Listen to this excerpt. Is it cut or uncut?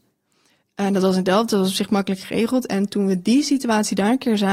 uncut